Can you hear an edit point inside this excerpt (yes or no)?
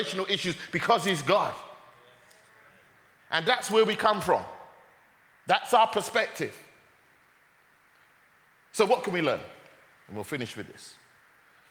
no